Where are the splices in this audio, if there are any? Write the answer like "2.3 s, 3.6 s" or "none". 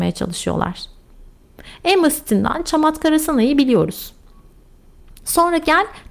none